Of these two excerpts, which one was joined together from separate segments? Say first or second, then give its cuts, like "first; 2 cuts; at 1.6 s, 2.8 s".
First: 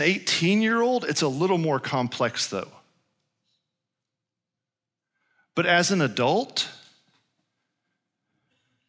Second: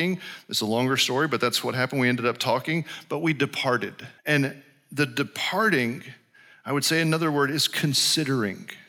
second; 1 cut; at 4.2 s